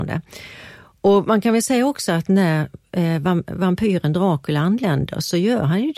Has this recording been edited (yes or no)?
no